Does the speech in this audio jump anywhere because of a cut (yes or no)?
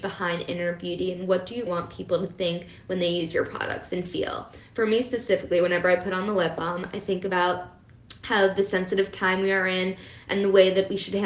yes